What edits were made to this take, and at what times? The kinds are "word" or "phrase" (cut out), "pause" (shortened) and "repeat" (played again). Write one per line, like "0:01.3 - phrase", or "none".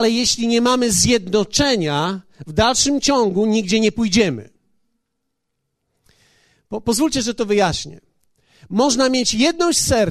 none

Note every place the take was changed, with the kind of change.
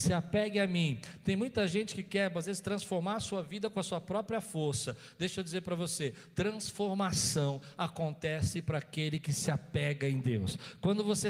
none

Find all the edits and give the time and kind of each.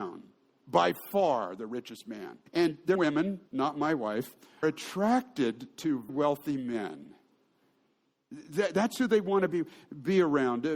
0:02.5 - pause
0:02.9 - phrase
0:03.5 - pause
0:04.6 - phrase
0:06.1 - word

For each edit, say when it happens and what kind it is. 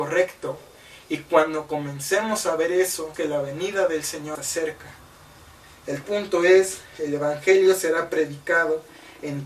0:03.1 - word
0:04.4 - word
0:06.0 - word

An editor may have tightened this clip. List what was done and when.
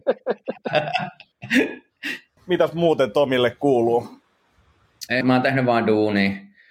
0:02.4 - word
0:05.2 - word

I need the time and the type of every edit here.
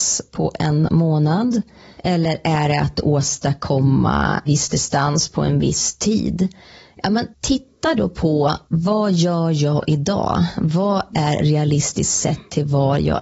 0:04.5 - word
0:07.3 - pause
0:08.7 - pause

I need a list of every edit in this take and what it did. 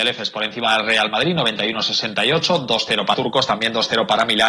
0:03.1 - word

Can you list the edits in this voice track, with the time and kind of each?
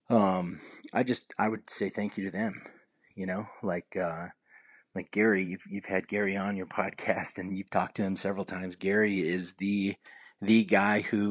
none

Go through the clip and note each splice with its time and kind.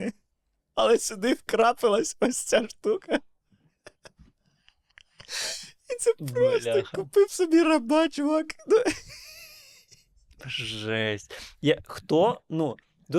none

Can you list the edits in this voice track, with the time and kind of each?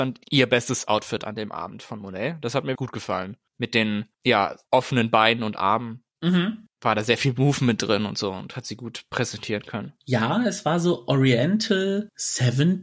0:02.8 - word
0:10.0 - pause

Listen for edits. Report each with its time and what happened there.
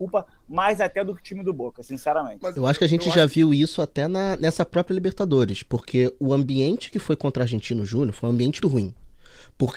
0:08.6 - word

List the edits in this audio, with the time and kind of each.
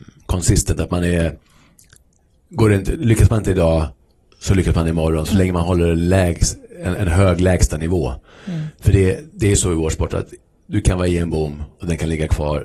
0:07.0 - word

